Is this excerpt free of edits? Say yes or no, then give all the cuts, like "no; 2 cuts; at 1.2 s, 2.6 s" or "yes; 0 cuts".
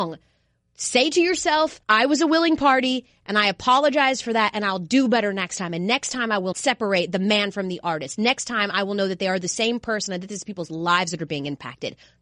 no; 2 cuts; at 1.8 s, 6.5 s